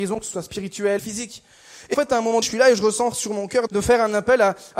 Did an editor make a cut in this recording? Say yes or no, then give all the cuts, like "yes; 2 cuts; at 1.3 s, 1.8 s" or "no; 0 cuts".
yes; 5 cuts; at 1.0 s, 1.9 s, 2.4 s, 3.1 s, 3.7 s